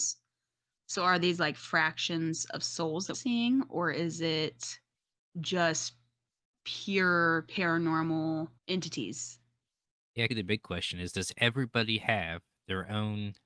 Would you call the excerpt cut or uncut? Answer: cut